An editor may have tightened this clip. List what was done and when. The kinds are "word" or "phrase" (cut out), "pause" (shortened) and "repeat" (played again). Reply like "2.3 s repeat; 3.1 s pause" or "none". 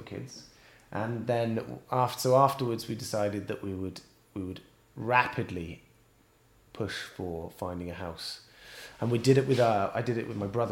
none